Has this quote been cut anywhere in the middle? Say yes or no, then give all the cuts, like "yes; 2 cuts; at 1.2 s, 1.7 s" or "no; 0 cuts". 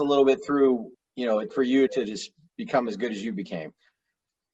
yes; 3 cuts; at 0.9 s, 1.5 s, 1.9 s